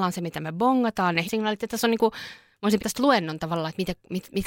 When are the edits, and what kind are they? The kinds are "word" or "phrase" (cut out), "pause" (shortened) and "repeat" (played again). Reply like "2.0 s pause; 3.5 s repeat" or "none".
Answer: 1.2 s word; 2.8 s word